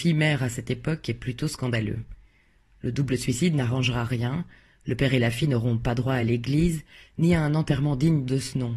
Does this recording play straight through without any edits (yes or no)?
yes